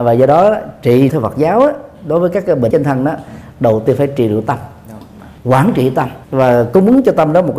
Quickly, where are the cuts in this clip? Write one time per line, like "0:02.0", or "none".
0:01.1
0:02.7
0:05.4
0:06.2

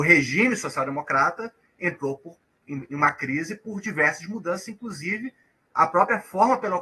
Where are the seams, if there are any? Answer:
none

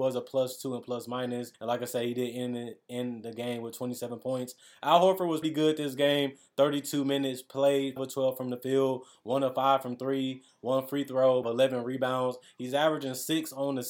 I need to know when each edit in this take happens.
0:01.5
0:05.4
0:08.0
0:11.4

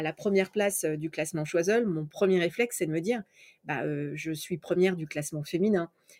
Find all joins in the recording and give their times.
none

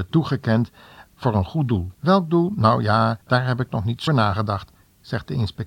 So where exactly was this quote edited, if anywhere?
0:01.9
0:03.2
0:04.1

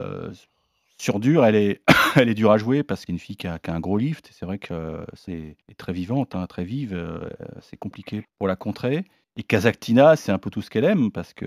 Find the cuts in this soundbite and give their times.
0:03.1
0:05.3
0:05.6
0:08.2
0:09.2
0:10.2

